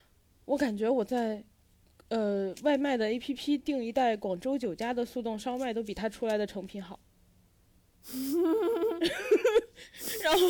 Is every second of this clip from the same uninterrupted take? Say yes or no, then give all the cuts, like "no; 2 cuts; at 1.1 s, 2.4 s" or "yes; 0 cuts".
yes; 0 cuts